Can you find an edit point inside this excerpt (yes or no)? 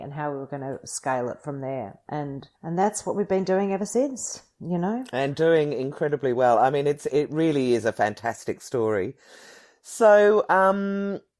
yes